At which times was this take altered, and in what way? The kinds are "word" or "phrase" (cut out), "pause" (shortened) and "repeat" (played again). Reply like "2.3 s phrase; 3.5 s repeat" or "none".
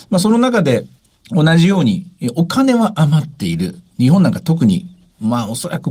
1.0 s pause